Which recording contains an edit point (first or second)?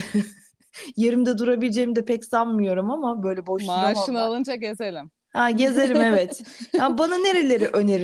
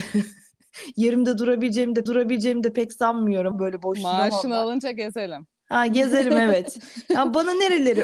second